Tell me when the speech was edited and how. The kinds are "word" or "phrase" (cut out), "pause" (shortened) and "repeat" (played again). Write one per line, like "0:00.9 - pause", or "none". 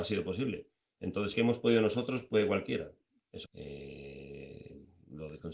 0:01.3 - word
0:03.4 - word